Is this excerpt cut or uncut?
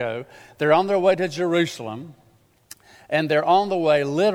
uncut